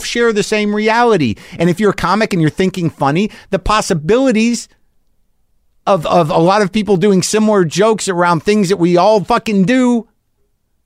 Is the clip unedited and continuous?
yes; 0 cuts

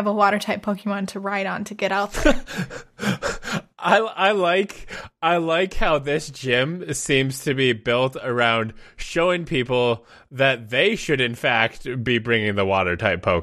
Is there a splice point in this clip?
no; 0 cuts

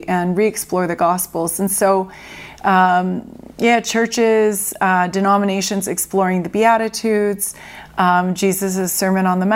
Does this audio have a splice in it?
no; 0 cuts

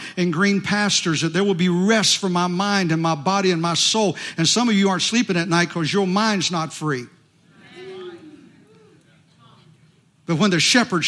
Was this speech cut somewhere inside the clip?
no; 0 cuts

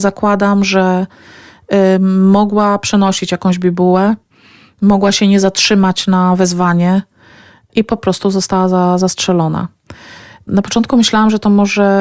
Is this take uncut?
yes; 0 cuts

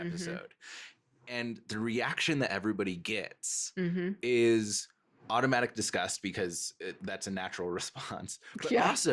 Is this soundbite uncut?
yes; 0 cuts

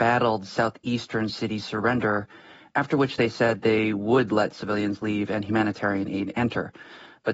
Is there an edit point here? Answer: no; 0 cuts

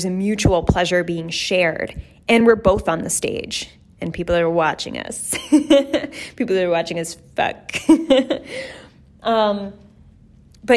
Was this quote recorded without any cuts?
yes; 0 cuts

